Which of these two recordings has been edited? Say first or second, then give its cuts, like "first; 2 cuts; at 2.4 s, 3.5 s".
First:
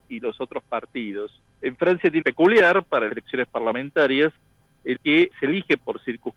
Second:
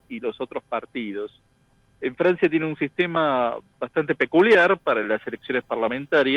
first; 5 cuts; at 1.4 s, 2.2 s, 3.1 s, 4.9 s, 5.3 s